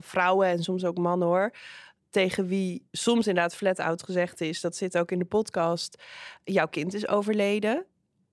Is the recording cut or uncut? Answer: uncut